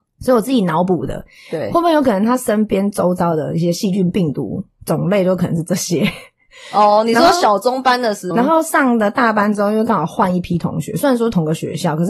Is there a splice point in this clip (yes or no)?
yes